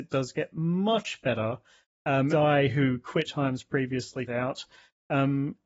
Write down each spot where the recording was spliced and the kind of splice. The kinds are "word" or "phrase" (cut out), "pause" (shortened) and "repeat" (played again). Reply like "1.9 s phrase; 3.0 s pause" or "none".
2.3 s word; 3.3 s word; 4.3 s word